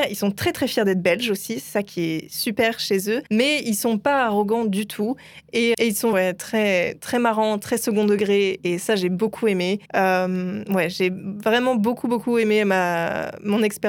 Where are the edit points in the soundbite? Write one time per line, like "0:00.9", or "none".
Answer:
0:03.3
0:05.7
0:06.1
0:09.9